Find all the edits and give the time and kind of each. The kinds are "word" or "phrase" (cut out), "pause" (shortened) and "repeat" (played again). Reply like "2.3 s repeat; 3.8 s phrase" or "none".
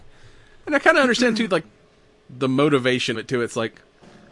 1.6 s word; 3.1 s word